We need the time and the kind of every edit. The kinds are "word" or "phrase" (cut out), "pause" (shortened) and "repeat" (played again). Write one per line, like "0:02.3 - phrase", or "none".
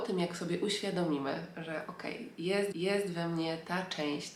0:02.7 - repeat